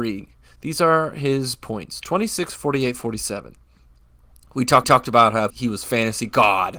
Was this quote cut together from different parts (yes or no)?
yes